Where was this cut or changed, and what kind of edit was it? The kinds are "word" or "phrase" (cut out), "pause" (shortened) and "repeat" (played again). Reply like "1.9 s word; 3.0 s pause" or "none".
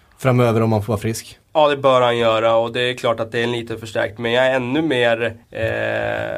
1.4 s pause; 5.4 s pause